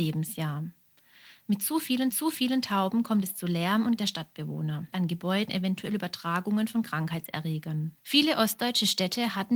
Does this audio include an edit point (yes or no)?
yes